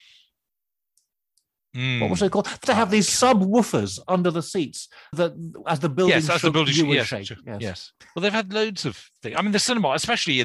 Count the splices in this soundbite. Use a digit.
3